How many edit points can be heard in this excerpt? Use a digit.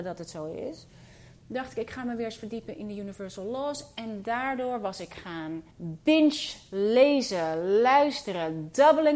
1